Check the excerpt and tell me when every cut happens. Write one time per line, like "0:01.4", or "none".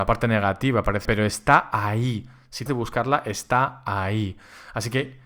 0:01.0
0:02.7